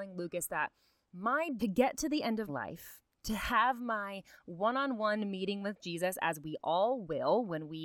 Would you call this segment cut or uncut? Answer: cut